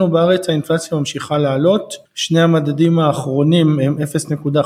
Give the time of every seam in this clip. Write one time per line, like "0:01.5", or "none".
0:02.1